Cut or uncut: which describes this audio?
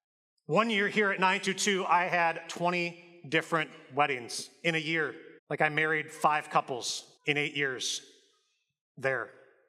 cut